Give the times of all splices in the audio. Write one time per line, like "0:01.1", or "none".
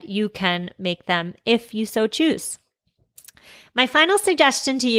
none